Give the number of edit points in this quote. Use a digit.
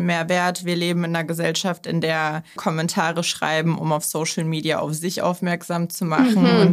1